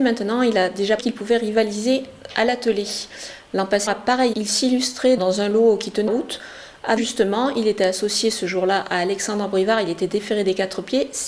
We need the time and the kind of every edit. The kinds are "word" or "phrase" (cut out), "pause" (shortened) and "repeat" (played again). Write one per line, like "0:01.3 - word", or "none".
0:01.0 - word
0:03.9 - word
0:04.3 - word
0:05.2 - word
0:06.1 - word
0:07.0 - word